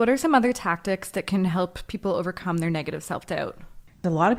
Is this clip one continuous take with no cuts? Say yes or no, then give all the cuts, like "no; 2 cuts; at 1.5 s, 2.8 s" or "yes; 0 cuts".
yes; 0 cuts